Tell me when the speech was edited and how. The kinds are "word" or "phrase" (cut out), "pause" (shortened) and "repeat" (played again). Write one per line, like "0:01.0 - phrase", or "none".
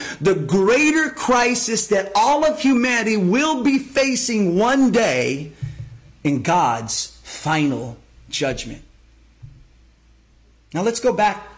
none